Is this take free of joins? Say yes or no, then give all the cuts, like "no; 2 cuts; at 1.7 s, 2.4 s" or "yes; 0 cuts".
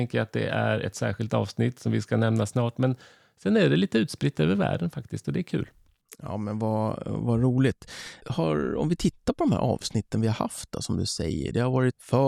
yes; 0 cuts